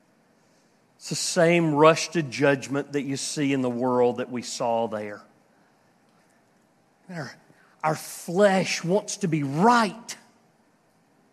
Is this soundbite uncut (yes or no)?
yes